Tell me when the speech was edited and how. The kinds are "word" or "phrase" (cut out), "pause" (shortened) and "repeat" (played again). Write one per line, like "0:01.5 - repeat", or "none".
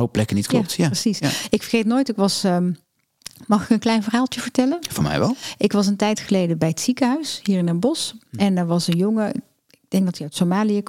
none